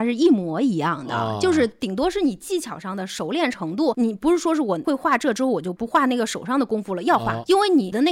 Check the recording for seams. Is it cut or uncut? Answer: uncut